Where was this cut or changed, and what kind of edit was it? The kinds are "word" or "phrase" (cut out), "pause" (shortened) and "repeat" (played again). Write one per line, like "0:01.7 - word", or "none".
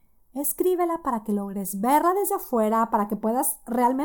none